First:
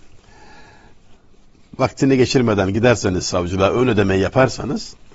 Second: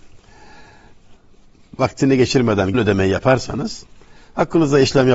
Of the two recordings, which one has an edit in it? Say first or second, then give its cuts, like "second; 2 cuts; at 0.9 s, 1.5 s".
second; 1 cut; at 2.7 s